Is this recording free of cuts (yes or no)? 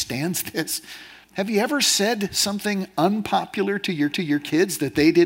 no